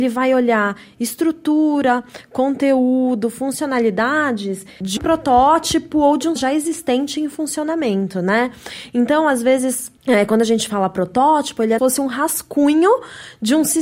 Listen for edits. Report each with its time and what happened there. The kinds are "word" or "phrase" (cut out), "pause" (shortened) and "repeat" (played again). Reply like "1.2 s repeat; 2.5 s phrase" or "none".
5.0 s word; 6.4 s word; 10.0 s pause; 11.8 s phrase